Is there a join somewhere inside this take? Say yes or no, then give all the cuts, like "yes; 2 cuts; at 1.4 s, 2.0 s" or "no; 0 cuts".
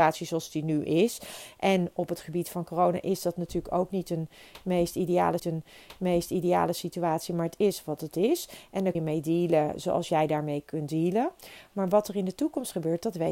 yes; 2 cuts; at 5.4 s, 8.9 s